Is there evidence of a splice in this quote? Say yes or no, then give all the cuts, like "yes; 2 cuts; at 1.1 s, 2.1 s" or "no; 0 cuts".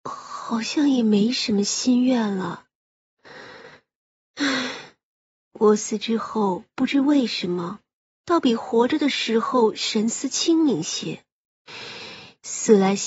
no; 0 cuts